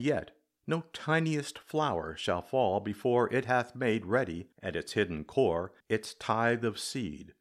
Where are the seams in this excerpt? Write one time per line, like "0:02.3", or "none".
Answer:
0:04.5
0:05.8